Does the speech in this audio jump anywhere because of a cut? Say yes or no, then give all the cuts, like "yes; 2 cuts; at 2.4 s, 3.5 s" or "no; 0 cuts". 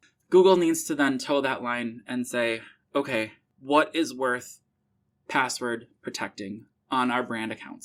no; 0 cuts